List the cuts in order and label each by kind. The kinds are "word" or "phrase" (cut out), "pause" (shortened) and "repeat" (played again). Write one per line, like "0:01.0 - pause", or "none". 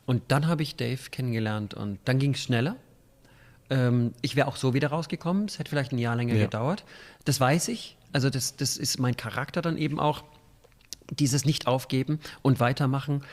0:02.0 - word